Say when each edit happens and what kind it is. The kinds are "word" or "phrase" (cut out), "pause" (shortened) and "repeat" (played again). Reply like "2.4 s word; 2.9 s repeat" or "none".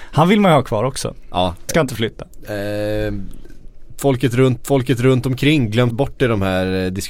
1.7 s word; 4.6 s repeat; 5.9 s word